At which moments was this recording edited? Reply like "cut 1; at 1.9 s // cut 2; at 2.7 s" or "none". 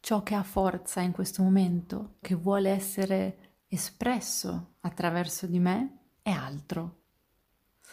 cut 1; at 2.2 s // cut 2; at 3.6 s